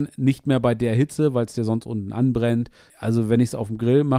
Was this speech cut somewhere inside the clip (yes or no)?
no